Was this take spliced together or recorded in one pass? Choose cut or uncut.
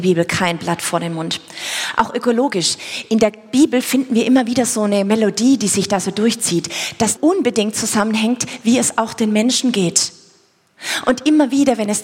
cut